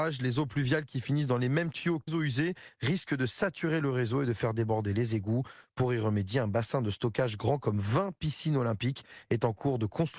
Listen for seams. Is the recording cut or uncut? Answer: cut